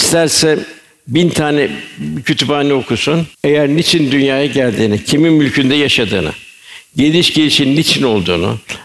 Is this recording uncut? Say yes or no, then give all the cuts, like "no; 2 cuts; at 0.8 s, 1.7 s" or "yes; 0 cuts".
no; 1 cut; at 3.3 s